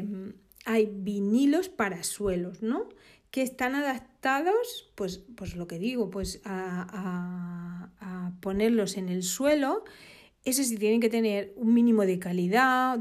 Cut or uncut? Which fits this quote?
uncut